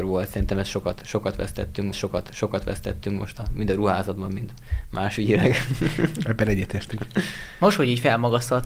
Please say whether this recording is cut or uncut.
cut